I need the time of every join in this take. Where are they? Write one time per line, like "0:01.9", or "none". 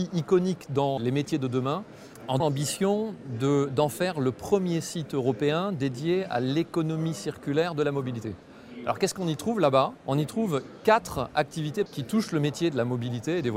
0:01.0
0:02.4
0:10.0
0:11.9